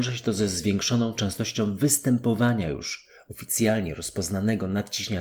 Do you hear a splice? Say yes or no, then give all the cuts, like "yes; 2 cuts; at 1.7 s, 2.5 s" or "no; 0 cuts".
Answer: no; 0 cuts